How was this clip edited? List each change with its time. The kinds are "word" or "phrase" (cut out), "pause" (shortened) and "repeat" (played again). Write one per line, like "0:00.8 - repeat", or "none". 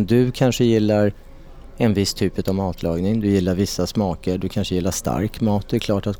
none